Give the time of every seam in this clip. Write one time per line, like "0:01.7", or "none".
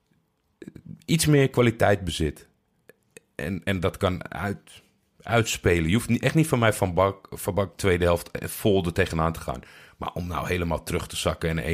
none